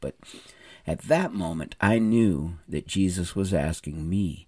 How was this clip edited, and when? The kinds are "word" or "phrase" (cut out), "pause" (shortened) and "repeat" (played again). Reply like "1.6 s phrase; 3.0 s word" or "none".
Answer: none